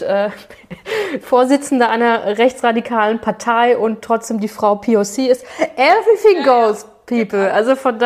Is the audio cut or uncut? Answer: uncut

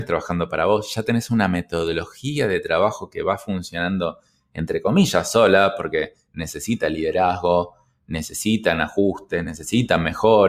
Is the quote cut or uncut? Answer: uncut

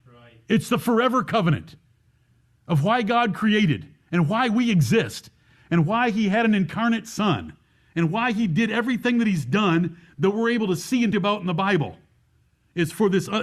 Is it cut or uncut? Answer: cut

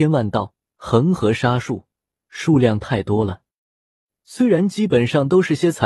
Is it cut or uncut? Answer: uncut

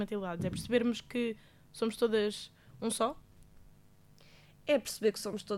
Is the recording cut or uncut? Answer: uncut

